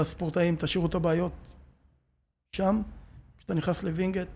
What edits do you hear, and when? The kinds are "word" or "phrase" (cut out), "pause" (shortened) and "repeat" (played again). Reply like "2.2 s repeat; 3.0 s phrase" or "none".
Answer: none